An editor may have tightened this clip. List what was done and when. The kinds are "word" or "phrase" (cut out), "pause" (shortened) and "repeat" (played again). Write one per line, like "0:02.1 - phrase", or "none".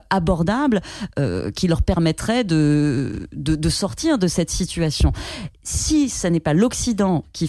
none